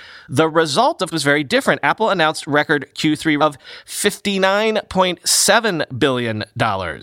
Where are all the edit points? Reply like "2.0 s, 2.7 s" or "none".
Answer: 1.1 s, 3.4 s